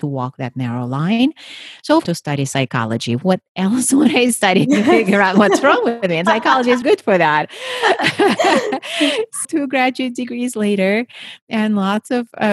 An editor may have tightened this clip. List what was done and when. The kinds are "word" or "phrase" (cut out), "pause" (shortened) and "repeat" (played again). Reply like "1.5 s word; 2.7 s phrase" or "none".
2.0 s phrase; 6.8 s word; 9.4 s word